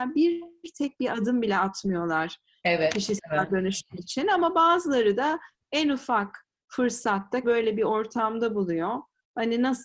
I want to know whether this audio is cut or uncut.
cut